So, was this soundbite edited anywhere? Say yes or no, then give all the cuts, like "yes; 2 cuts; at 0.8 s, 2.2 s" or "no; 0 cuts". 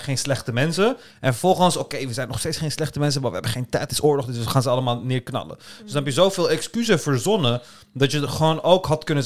yes; 1 cut; at 3.9 s